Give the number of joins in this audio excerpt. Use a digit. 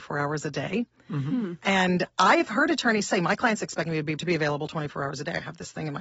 1